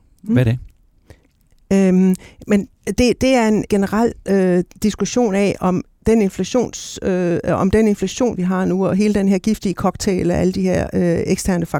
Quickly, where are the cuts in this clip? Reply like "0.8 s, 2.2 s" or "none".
2.8 s, 3.7 s